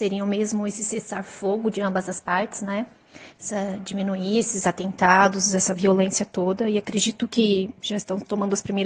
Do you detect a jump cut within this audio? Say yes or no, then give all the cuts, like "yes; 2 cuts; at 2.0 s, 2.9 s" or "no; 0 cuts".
no; 0 cuts